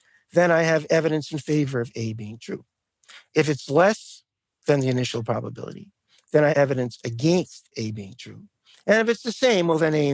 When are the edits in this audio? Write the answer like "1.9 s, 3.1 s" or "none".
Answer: 6.5 s

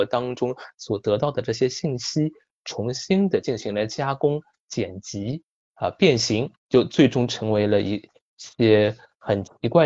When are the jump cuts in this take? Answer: 6.6 s

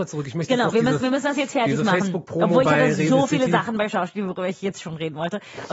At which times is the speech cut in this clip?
none

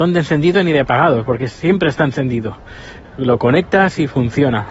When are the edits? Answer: none

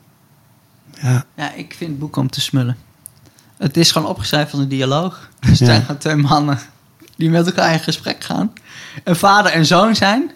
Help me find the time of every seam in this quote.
1.3 s

